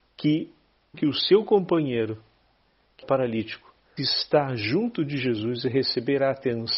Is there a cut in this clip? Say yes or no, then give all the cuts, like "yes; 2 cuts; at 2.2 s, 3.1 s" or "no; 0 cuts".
yes; 3 cuts; at 0.9 s, 3.0 s, 4.0 s